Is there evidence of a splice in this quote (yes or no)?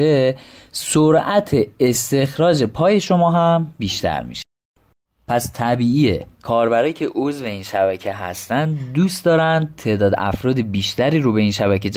no